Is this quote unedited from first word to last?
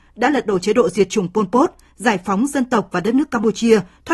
yes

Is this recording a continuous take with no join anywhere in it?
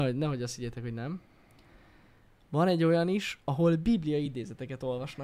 yes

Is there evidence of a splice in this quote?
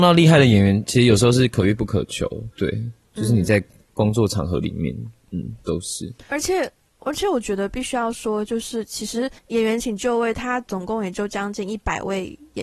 yes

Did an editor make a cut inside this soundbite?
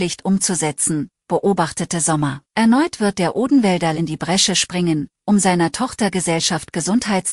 yes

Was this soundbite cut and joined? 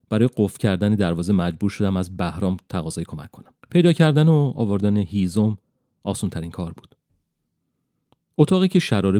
yes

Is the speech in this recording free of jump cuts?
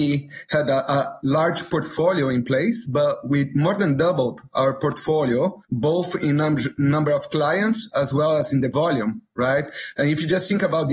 no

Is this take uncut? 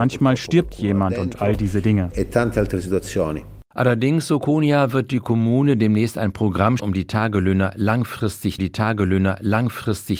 no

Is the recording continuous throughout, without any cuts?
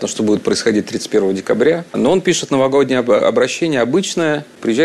yes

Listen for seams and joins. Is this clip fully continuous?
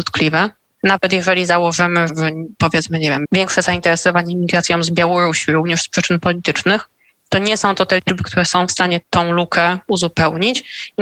no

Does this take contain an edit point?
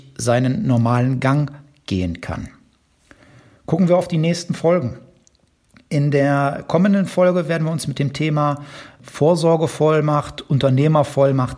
no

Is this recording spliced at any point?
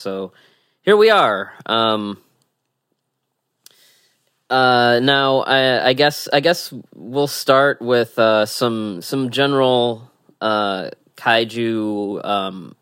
no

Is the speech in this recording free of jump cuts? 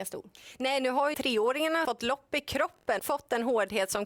no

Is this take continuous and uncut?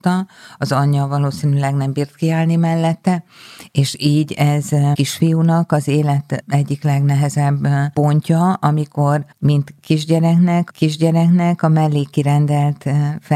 no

